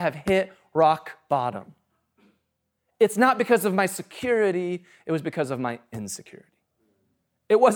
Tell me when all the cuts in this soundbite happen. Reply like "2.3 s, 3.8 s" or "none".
none